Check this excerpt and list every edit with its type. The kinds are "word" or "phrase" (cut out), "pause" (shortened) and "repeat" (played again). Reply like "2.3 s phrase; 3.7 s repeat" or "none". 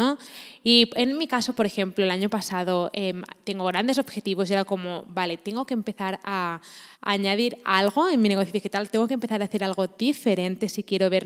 6.9 s pause